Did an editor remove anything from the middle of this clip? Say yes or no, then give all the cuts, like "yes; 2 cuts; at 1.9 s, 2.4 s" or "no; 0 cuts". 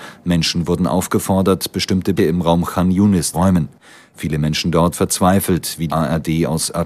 yes; 4 cuts; at 2.2 s, 3.3 s, 4.9 s, 5.9 s